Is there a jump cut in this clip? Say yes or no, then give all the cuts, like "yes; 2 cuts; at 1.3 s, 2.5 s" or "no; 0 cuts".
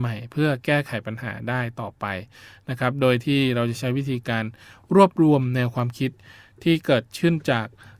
no; 0 cuts